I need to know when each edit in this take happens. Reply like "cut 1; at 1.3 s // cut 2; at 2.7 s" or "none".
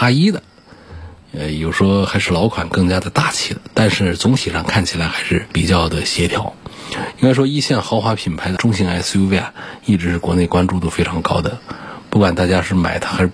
none

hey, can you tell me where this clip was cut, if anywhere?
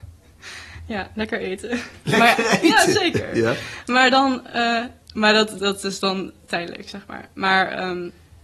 cut 1; at 5.0 s // cut 2; at 5.6 s

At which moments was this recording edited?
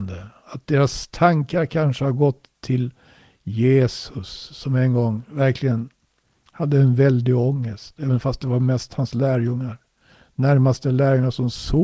none

